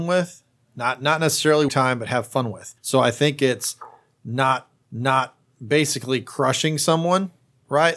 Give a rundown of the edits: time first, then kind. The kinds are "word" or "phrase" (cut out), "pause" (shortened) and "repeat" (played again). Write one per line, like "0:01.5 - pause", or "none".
0:01.7 - phrase
0:02.8 - pause
0:04.8 - repeat